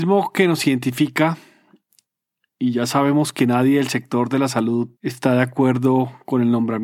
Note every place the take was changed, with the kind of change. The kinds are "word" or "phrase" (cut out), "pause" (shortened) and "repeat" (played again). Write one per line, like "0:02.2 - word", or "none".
0:05.0 - pause